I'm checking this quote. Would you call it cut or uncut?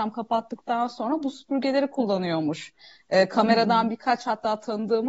uncut